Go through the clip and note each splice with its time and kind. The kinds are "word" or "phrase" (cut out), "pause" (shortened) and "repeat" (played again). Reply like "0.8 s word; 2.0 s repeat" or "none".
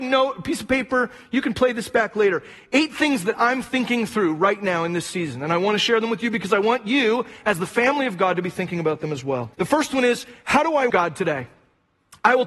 9.5 s pause; 10.9 s word